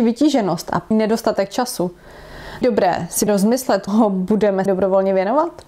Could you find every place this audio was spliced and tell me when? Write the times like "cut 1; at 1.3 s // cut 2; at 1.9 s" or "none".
cut 1; at 0.9 s // cut 2; at 2.6 s // cut 3; at 3.3 s // cut 4; at 3.9 s // cut 5; at 4.7 s

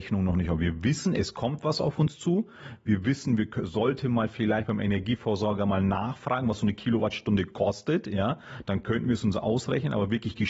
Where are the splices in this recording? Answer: none

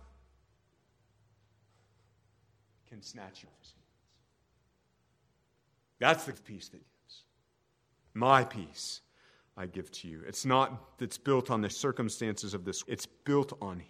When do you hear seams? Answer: cut 1; at 3.4 s // cut 2; at 6.3 s // cut 3; at 6.8 s // cut 4; at 11.0 s // cut 5; at 11.7 s // cut 6; at 12.8 s

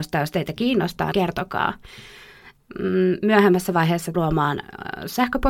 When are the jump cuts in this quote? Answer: cut 1; at 1.1 s // cut 2; at 4.1 s

